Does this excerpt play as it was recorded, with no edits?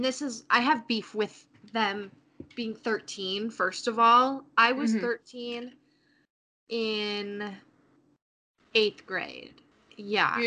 yes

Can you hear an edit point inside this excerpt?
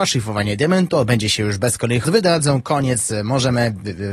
yes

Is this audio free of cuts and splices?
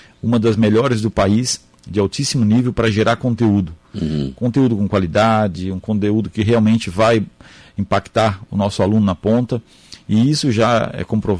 yes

